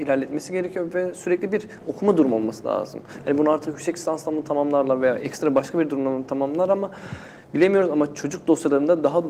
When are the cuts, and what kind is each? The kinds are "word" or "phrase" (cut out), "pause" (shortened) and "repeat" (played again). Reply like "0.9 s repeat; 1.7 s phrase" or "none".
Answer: none